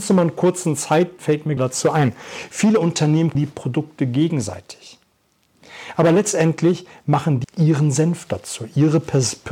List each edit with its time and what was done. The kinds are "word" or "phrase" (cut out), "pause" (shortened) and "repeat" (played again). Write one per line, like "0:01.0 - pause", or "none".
0:01.2 - word
0:01.6 - word
0:03.3 - word
0:07.4 - word

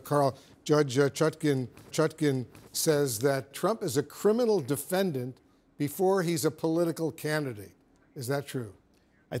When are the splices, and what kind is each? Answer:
0:01.9 - repeat
0:03.5 - word

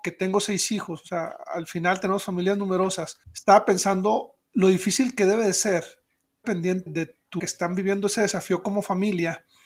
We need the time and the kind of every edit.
0:03.2 - pause
0:04.4 - pause
0:06.4 - phrase
0:06.9 - word
0:07.4 - word

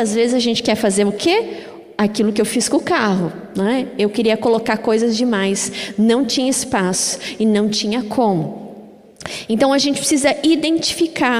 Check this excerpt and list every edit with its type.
none

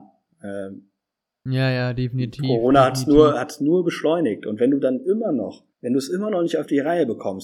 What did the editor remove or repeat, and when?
0:05.7 - pause

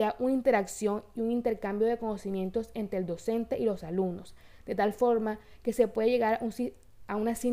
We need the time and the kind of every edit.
none

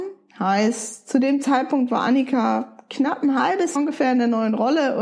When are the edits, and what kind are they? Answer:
0:03.8 - word

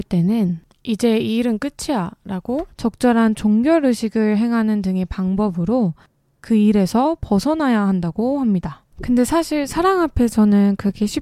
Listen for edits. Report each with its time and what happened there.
0:02.7 - pause
0:08.9 - pause

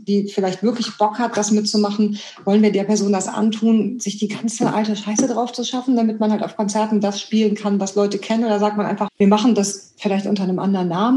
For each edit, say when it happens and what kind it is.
0:09.1 - phrase

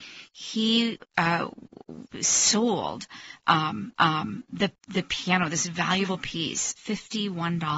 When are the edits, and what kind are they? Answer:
0:02.1 - pause
0:03.9 - repeat
0:06.8 - phrase

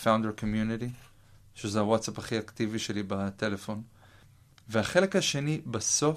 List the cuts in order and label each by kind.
none

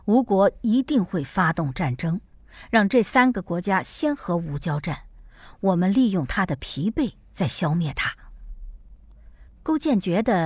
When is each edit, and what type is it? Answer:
0:09.5 - pause

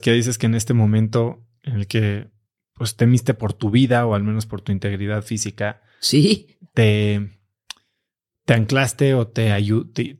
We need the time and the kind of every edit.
none

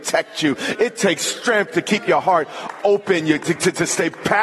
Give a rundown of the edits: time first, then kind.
none

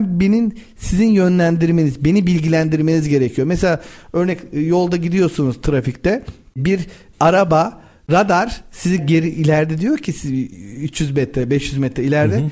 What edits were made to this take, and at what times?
0:09.0 - word

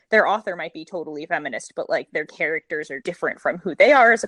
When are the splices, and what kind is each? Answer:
0:03.0 - word

